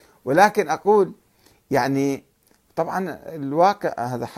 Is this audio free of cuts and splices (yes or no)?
yes